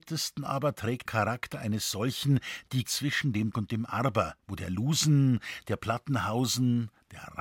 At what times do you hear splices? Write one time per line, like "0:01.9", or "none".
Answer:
0:01.1
0:02.8
0:03.5
0:04.4